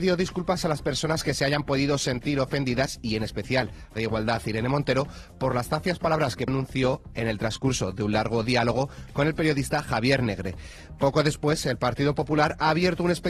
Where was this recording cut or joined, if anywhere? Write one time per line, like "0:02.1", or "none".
0:04.0
0:06.5